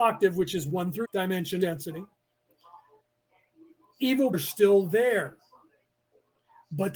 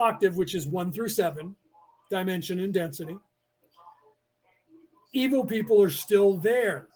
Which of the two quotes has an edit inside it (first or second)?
first